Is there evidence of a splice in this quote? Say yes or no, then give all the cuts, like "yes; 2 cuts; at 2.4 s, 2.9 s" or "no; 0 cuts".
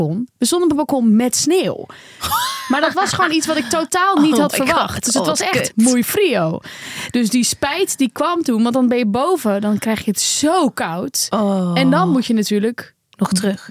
no; 0 cuts